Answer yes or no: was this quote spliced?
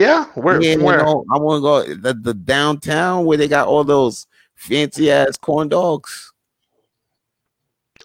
no